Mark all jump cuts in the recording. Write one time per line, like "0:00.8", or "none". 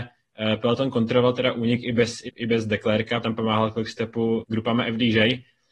0:02.3
0:03.2
0:04.4